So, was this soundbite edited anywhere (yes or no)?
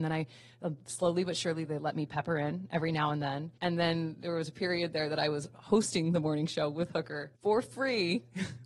yes